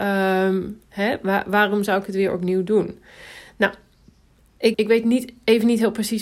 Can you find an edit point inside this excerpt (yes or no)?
yes